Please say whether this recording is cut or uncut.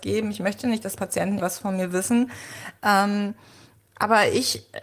cut